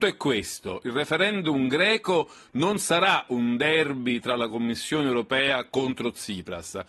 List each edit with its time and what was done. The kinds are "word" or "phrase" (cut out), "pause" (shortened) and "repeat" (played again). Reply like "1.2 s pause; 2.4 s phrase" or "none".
none